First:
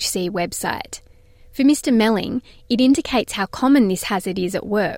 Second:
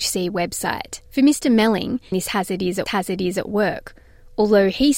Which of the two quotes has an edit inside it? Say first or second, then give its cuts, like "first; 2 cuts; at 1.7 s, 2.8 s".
second; 3 cuts; at 1.1 s, 2.1 s, 2.9 s